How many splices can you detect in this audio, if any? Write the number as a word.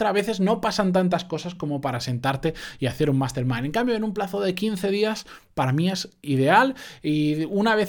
zero